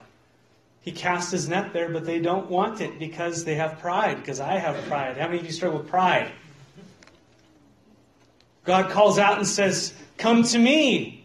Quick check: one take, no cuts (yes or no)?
yes